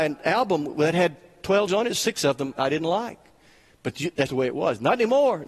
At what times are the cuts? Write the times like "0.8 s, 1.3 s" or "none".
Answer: 1.7 s, 2.5 s, 4.3 s